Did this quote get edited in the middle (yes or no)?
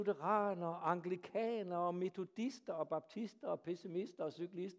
no